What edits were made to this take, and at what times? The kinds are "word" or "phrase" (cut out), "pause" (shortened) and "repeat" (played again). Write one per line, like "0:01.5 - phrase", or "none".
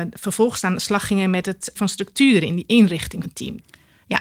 0:01.8 - word
0:03.2 - word